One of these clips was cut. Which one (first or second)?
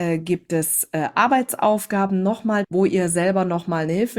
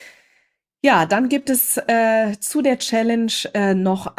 first